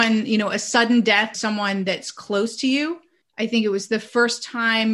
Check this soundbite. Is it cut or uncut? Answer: cut